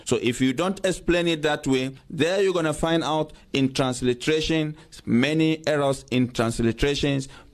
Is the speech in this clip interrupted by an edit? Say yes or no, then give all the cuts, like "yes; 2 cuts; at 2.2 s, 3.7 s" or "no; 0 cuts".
no; 0 cuts